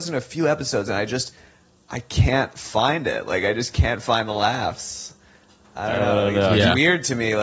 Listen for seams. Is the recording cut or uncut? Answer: uncut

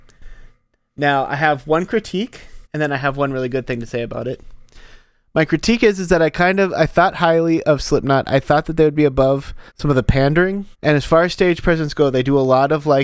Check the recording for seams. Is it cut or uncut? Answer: cut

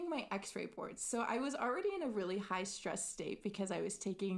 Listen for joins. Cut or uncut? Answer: uncut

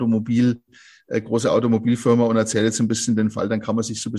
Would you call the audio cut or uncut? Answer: uncut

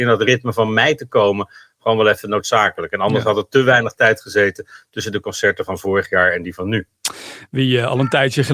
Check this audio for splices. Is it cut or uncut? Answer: uncut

